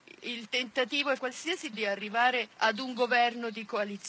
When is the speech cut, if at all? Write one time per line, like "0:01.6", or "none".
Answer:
0:01.2
0:01.7
0:02.5